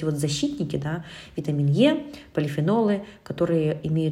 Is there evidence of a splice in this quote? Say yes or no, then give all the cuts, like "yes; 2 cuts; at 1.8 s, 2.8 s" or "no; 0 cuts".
no; 0 cuts